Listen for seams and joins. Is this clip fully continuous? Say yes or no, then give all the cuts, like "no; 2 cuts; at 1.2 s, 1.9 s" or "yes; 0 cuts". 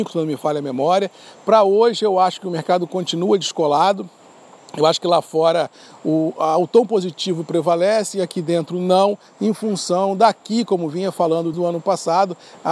no; 1 cut; at 11.5 s